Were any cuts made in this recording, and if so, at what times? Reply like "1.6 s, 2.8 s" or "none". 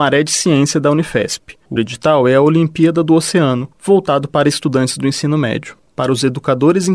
1.8 s